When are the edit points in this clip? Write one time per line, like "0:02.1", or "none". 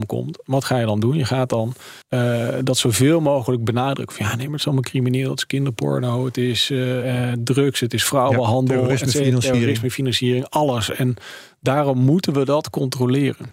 0:02.0